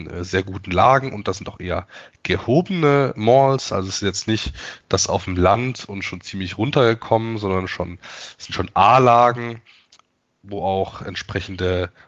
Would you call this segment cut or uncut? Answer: uncut